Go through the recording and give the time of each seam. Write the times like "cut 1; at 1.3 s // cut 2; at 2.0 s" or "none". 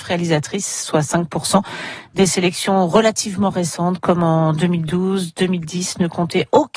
none